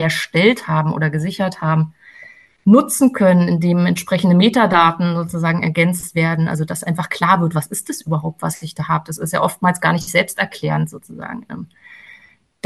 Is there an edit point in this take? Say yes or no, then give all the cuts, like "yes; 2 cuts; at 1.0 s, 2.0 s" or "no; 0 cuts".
no; 0 cuts